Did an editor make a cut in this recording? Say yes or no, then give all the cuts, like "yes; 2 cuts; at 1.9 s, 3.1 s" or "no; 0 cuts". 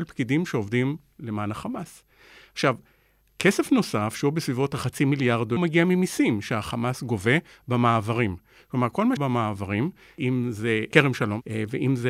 yes; 2 cuts; at 5.6 s, 9.2 s